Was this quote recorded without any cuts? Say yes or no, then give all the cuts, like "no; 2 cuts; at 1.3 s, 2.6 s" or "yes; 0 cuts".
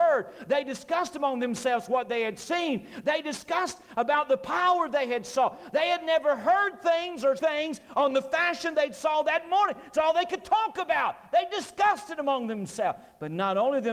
no; 1 cut; at 7.4 s